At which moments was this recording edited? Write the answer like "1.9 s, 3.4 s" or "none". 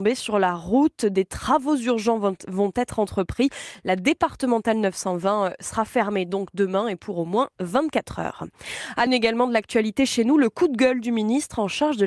9.1 s

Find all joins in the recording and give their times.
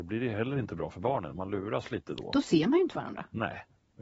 none

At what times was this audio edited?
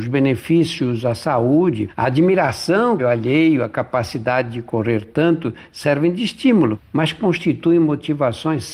3.0 s

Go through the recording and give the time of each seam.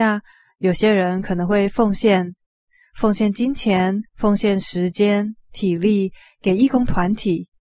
4.1 s

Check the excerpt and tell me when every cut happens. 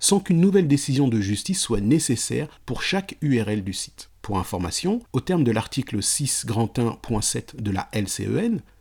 4.2 s, 5.1 s

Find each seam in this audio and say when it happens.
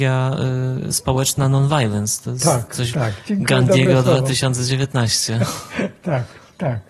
2.9 s

